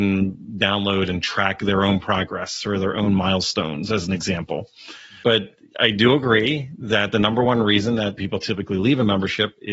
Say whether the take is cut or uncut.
uncut